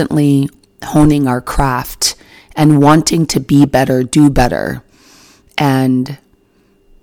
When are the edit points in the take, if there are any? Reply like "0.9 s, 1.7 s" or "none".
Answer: none

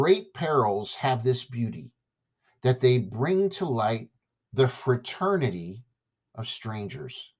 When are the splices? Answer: none

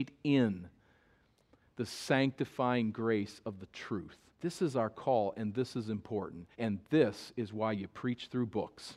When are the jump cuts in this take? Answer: 4.3 s, 6.5 s

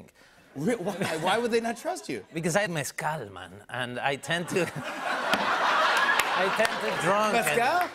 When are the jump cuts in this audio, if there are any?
2.7 s, 7.0 s

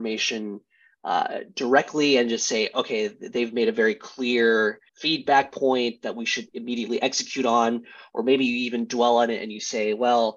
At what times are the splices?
4.9 s

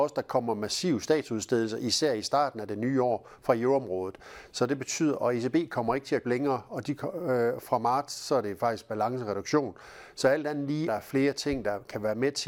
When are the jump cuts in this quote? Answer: 6.2 s, 10.9 s

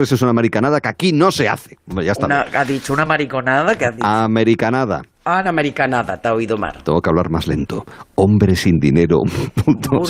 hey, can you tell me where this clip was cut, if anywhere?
none

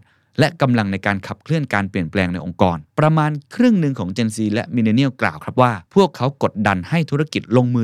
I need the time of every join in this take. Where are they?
2.9 s, 5.9 s

